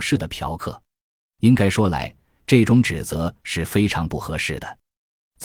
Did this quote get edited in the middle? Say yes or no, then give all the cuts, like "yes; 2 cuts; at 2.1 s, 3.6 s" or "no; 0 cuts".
no; 0 cuts